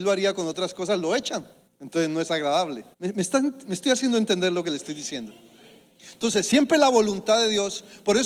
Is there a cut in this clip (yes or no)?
yes